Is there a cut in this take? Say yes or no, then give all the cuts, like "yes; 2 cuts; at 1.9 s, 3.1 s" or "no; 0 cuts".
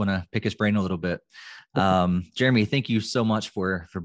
no; 0 cuts